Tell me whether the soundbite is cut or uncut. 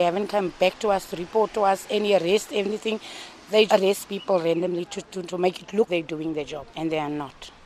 cut